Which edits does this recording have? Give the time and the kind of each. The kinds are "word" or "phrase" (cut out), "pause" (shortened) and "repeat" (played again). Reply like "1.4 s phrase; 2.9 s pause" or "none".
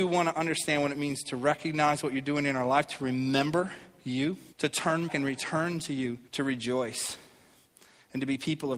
4.5 s pause; 5.1 s word; 6.3 s pause